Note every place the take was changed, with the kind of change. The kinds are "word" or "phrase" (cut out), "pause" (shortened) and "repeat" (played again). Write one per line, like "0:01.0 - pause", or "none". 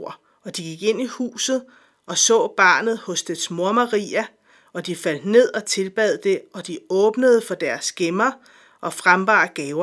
none